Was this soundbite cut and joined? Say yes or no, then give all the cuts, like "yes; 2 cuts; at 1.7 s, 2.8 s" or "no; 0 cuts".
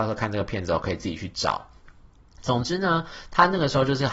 no; 0 cuts